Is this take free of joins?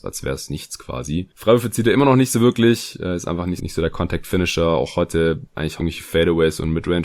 no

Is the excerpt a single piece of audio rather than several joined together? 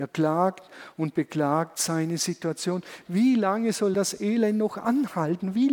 yes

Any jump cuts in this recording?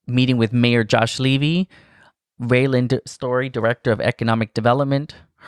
no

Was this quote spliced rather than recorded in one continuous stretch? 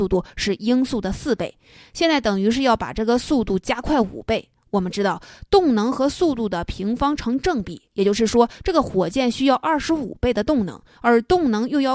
no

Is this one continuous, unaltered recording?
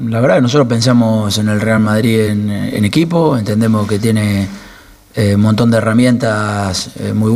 yes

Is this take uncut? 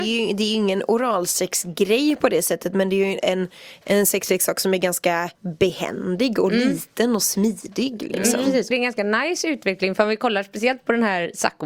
no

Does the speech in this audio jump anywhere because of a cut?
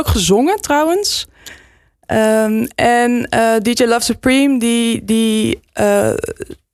no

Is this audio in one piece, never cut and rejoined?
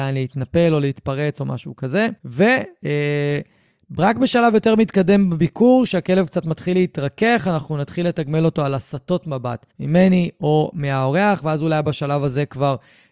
no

